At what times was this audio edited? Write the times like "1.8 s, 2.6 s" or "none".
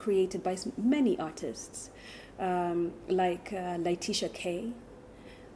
none